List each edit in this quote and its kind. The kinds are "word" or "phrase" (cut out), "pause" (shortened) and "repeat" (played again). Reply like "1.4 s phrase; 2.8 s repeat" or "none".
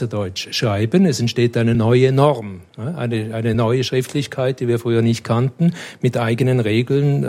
none